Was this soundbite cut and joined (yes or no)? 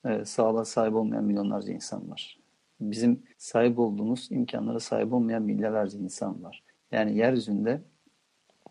yes